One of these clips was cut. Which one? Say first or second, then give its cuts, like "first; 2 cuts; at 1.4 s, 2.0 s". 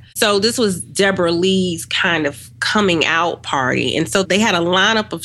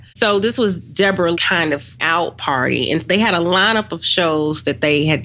second; 3 cuts; at 1.3 s, 2.0 s, 3.0 s